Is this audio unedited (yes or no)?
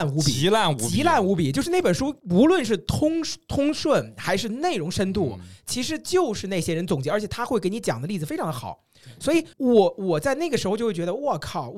no